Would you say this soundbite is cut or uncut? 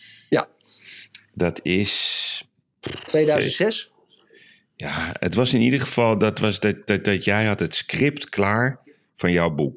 uncut